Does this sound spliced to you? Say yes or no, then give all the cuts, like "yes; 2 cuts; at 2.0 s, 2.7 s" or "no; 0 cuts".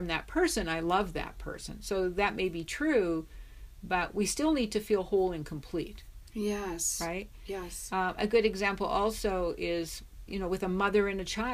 yes; 1 cut; at 10.3 s